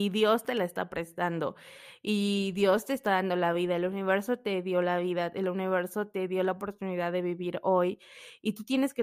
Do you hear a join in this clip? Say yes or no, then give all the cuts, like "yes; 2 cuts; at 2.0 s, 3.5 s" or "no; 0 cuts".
no; 0 cuts